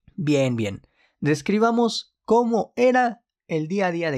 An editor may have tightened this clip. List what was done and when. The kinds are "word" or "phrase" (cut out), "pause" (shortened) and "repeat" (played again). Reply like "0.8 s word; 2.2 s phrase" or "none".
none